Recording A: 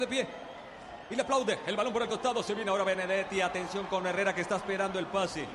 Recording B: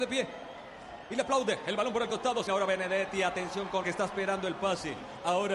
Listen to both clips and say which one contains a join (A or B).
B